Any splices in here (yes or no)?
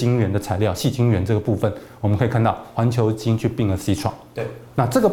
no